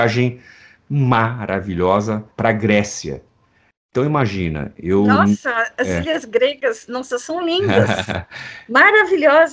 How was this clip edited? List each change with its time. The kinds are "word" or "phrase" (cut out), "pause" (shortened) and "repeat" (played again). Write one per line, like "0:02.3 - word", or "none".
0:02.3 - pause

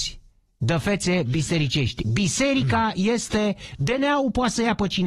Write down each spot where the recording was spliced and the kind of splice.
none

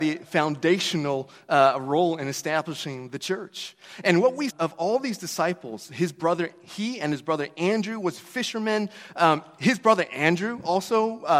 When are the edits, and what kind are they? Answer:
0:04.5 - phrase

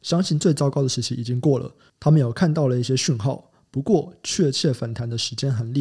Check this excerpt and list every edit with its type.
none

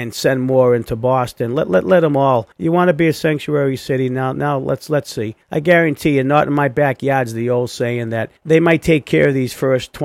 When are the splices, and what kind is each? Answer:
0:02.5 - pause
0:05.4 - pause
0:08.4 - pause

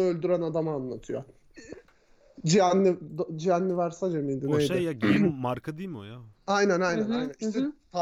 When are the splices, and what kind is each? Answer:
none

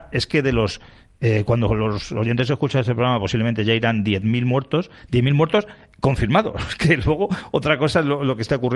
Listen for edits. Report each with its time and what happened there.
none

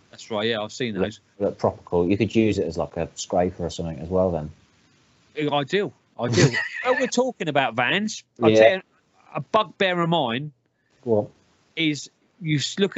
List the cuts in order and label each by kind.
none

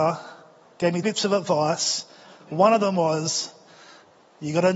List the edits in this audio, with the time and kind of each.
0:01.0 - word

